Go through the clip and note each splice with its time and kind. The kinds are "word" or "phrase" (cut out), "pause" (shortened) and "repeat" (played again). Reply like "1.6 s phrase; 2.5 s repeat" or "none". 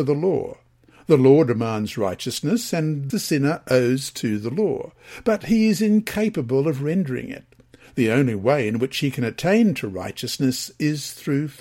3.1 s word